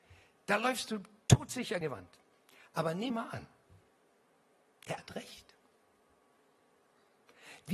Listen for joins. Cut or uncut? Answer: cut